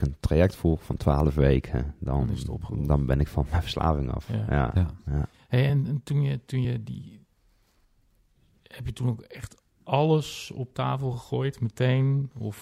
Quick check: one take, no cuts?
yes; 0 cuts

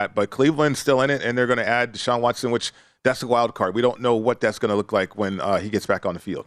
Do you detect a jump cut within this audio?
no; 0 cuts

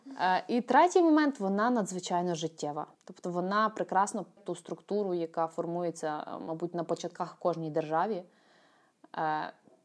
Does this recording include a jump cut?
yes; 2 cuts; at 2.9 s, 4.4 s

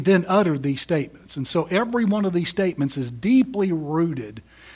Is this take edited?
no; 0 cuts

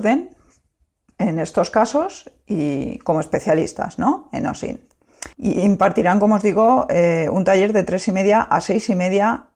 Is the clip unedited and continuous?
no; 1 cut; at 5.3 s

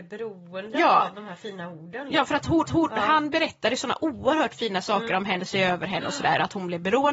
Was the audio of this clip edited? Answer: yes; 2 cuts; at 2.6 s, 5.4 s

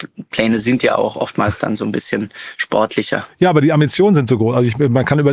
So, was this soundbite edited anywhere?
no; 0 cuts

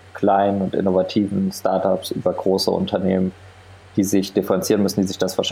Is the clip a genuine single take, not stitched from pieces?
yes; 0 cuts

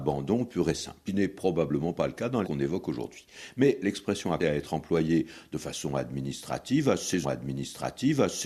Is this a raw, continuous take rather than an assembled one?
no; 4 cuts; at 1.1 s, 2.4 s, 4.4 s, 7.2 s

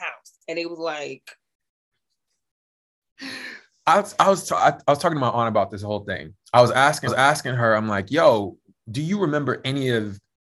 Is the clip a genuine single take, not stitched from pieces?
no; 1 cut; at 7.1 s

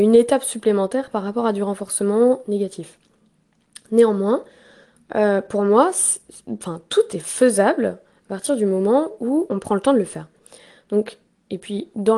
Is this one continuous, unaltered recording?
yes; 0 cuts

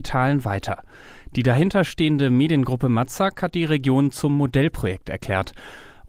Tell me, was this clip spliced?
no; 0 cuts

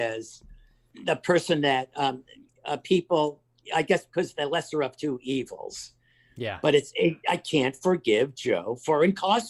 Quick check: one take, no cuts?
yes; 0 cuts

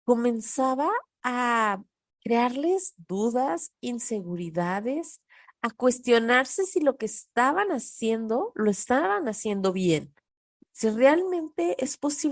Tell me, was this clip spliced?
no; 0 cuts

